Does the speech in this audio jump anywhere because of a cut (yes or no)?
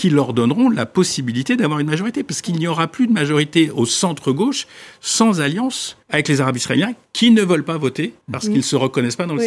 yes